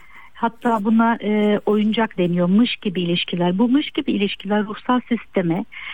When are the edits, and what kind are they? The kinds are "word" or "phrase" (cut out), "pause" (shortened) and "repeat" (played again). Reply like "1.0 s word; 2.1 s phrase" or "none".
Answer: 2.2 s word